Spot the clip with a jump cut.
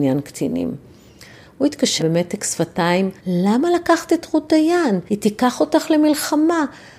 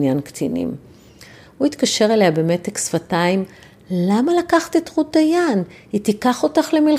first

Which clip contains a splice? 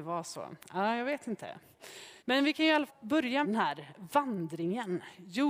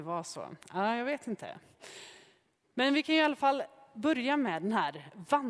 first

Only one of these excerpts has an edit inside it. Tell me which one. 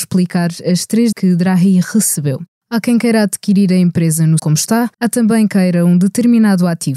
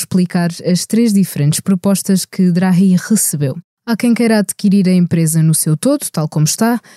first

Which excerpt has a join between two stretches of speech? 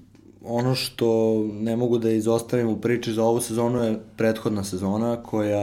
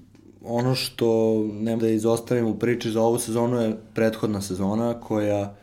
second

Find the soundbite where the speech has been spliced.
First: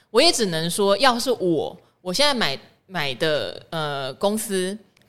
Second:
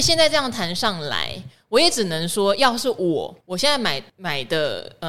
second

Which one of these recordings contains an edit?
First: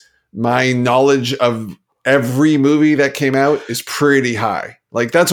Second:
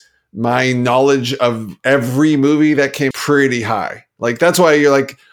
second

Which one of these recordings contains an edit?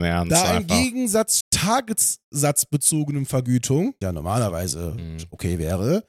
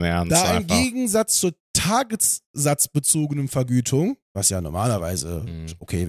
first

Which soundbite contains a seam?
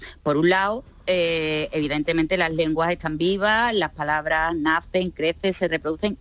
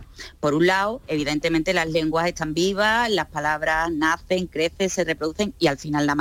second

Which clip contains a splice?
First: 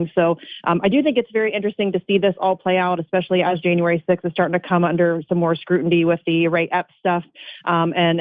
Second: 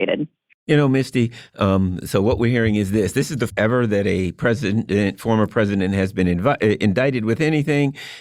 second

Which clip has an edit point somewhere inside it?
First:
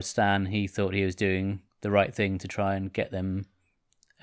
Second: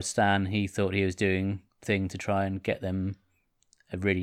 second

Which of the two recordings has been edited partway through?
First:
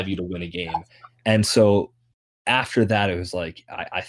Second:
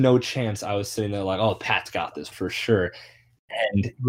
second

